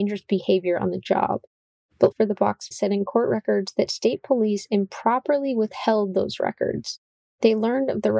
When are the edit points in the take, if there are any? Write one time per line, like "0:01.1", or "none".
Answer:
0:02.1
0:02.7